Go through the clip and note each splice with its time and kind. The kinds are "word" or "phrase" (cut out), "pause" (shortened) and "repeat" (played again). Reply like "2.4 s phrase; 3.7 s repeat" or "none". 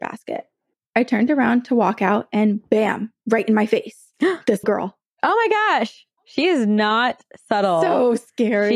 3.2 s pause; 4.6 s word; 6.2 s pause